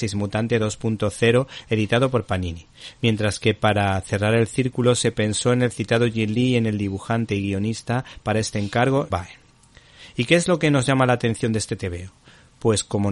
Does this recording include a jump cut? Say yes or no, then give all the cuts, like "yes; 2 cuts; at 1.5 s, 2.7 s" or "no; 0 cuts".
yes; 1 cut; at 9.1 s